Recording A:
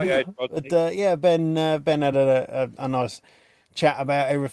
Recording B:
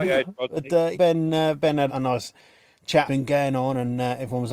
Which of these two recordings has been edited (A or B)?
B